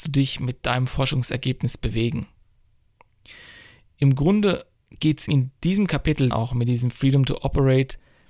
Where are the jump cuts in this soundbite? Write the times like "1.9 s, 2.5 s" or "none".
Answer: 5.3 s, 6.3 s